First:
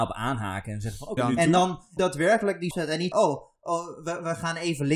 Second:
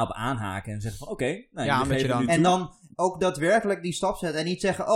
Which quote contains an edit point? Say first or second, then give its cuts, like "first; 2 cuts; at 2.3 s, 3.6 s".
first; 4 cuts; at 1.2 s, 2.0 s, 2.7 s, 3.1 s